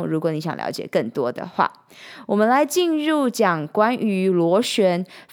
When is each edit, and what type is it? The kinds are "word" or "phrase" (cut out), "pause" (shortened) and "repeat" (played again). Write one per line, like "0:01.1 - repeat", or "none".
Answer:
none